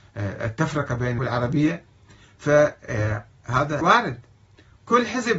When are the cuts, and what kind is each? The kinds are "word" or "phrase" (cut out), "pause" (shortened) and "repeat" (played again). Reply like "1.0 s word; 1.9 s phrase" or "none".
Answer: 1.2 s word; 3.8 s word